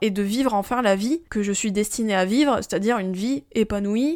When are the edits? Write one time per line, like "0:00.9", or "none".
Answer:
0:01.3